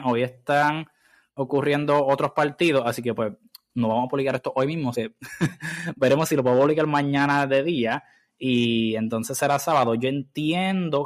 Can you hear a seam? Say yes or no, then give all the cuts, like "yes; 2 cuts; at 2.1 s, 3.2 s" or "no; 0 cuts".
yes; 1 cut; at 4.9 s